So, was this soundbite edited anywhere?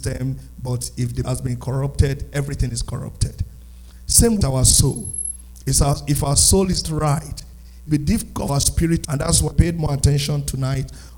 yes; 7 cuts; at 1.2 s, 4.4 s, 6.8 s, 7.9 s, 8.5 s, 9.0 s, 9.5 s

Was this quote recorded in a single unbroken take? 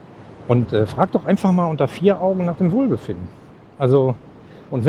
yes; 0 cuts

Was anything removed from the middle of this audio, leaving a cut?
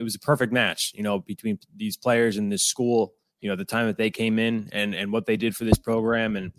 no; 0 cuts

